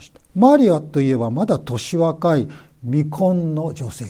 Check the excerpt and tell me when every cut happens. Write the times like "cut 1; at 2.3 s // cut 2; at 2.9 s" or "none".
none